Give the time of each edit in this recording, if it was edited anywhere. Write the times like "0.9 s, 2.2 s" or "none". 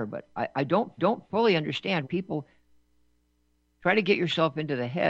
1.0 s, 2.0 s